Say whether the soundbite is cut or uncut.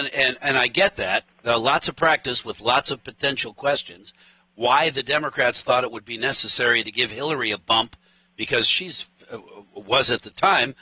uncut